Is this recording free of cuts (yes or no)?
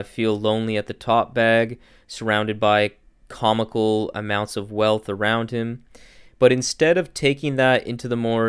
yes